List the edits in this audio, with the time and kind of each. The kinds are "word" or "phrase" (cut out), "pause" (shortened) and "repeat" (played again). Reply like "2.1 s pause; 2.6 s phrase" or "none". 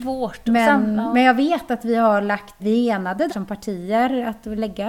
2.6 s word; 3.3 s word